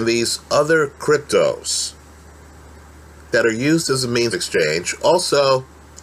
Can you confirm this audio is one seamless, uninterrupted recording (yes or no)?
no